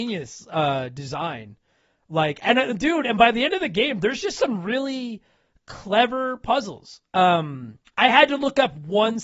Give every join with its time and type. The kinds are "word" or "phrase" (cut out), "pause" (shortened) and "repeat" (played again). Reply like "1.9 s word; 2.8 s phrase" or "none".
none